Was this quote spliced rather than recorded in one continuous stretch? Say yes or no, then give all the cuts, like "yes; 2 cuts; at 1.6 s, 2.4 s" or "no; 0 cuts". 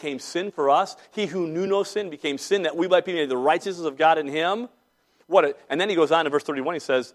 no; 0 cuts